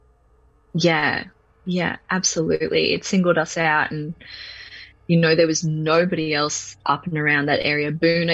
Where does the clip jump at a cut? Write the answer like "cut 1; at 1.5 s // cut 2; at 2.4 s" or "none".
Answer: cut 1; at 6.8 s